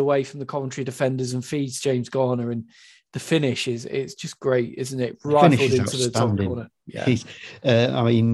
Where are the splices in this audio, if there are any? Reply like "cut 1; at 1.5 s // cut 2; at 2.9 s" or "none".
none